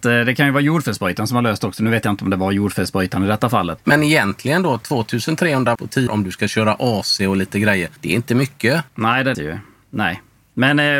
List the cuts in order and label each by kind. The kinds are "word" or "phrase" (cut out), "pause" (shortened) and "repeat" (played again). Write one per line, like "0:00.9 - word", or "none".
0:03.8 - word
0:05.7 - word
0:06.1 - word
0:08.0 - pause
0:08.9 - pause
0:09.3 - word